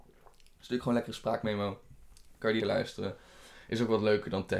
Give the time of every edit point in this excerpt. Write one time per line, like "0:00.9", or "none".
0:02.6